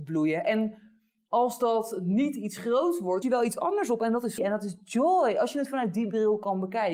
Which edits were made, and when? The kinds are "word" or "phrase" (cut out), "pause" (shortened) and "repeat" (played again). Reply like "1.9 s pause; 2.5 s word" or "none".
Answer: 3.2 s phrase; 4.4 s word